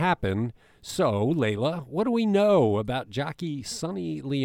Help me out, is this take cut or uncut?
uncut